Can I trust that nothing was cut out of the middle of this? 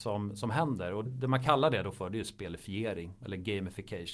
no; 1 cut; at 1.0 s

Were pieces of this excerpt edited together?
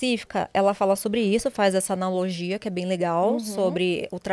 no; 0 cuts

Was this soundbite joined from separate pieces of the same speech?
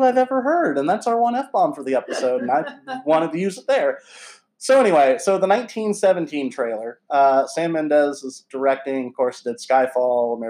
no; 0 cuts

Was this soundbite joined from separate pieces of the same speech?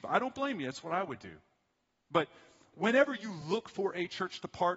no; 0 cuts

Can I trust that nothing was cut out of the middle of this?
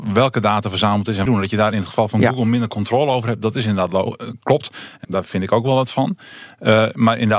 no; 2 cuts; at 1.3 s, 5.0 s

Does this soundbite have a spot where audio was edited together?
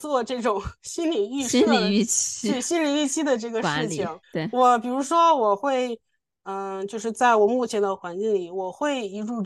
yes; 1 cut; at 4.2 s

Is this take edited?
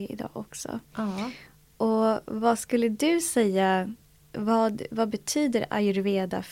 no; 0 cuts

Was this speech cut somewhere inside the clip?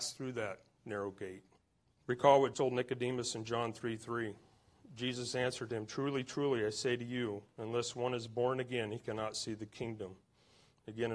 yes; 2 cuts; at 1.6 s, 2.5 s

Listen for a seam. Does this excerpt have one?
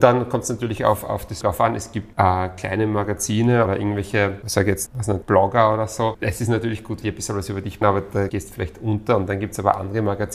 yes; 9 cuts; at 1.4 s, 2.1 s, 3.7 s, 4.4 s, 4.9 s, 5.2 s, 7.0 s, 7.8 s, 8.3 s

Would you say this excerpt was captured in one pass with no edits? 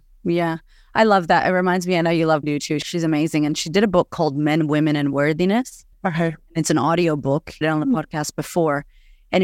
no; 3 cuts; at 2.4 s, 5.9 s, 7.6 s

